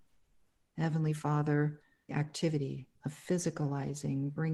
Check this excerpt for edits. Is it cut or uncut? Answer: cut